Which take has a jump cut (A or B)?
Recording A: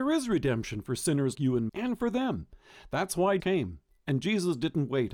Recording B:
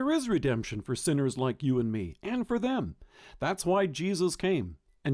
A